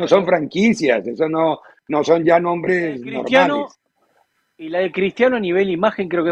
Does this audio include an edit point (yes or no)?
no